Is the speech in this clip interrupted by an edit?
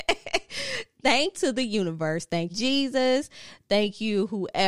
yes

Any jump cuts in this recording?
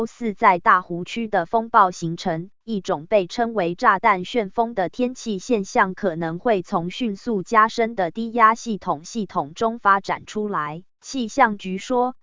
yes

